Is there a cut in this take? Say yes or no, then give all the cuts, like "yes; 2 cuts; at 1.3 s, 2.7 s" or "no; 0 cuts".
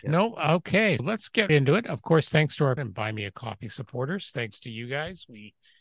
yes; 3 cuts; at 1.0 s, 1.5 s, 2.8 s